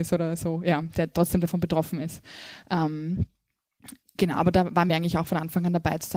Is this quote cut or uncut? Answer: uncut